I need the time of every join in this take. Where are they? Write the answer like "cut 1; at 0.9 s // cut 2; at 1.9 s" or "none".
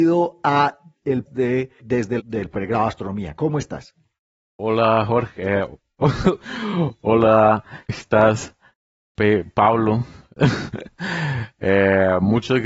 cut 1; at 1.3 s // cut 2; at 1.8 s // cut 3; at 2.2 s // cut 4; at 7.9 s